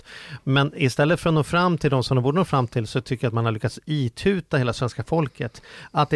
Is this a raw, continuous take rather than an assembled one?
yes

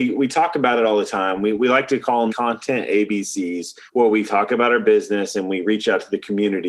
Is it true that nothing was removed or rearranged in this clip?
no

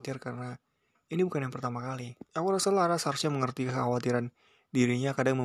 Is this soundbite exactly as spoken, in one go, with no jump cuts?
no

